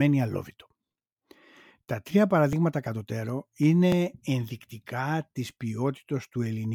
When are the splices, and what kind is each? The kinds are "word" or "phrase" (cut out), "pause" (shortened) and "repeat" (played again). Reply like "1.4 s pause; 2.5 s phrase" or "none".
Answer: none